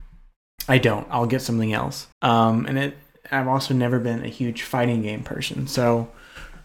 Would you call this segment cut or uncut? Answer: cut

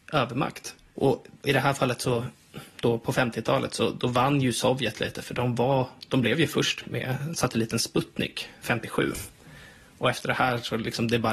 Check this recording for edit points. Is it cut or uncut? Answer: cut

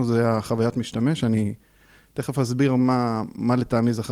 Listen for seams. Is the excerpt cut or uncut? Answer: uncut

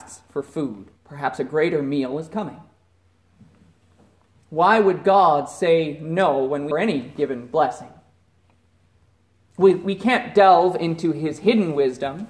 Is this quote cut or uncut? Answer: cut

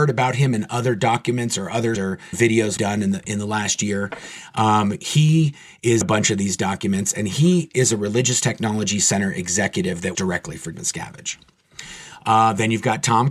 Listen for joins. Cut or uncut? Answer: cut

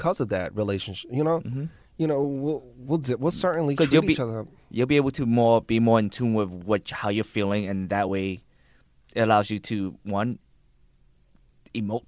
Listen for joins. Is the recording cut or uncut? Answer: uncut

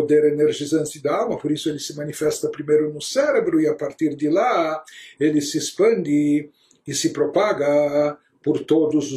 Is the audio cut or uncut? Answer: uncut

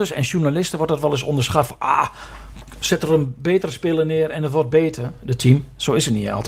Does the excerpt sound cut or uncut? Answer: uncut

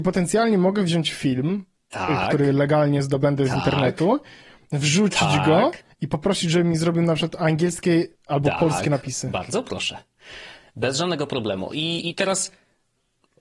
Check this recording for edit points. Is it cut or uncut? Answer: cut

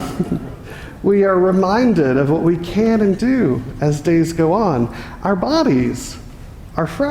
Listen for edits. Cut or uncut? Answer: cut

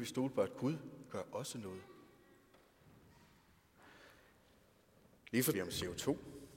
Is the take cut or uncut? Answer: cut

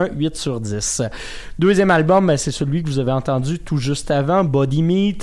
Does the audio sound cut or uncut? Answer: uncut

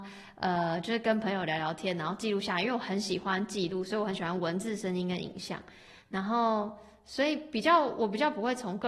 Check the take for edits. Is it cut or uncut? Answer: uncut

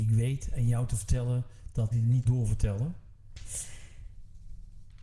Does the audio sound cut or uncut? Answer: cut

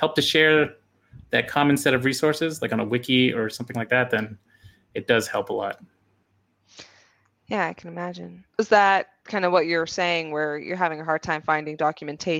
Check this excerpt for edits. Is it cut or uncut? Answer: cut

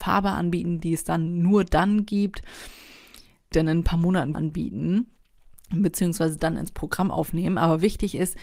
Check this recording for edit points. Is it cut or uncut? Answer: cut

